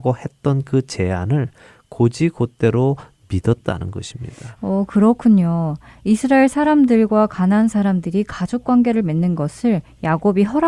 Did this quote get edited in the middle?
no; 0 cuts

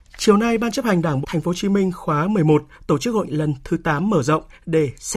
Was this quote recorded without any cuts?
no; 2 cuts; at 1.2 s, 3.2 s

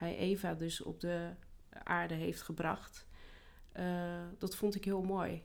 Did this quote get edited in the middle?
no; 0 cuts

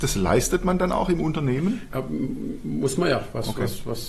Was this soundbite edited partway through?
no; 0 cuts

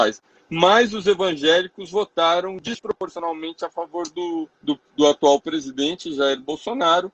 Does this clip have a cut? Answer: yes; 1 cut; at 4.5 s

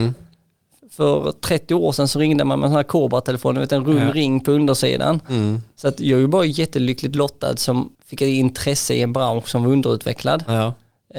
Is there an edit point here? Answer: yes; 1 cut; at 7.9 s

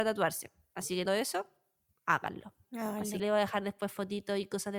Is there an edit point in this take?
yes; 2 cuts; at 1.1 s, 3.2 s

